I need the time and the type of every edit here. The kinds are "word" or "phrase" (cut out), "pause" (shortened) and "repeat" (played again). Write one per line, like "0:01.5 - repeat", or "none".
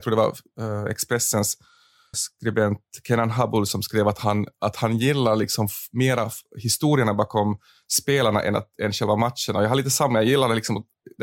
0:02.1 - word